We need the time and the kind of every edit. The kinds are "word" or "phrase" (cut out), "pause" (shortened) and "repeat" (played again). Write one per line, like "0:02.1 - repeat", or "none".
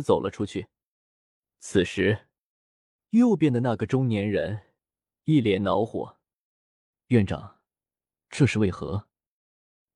none